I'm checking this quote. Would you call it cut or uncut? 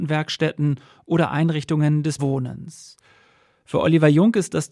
cut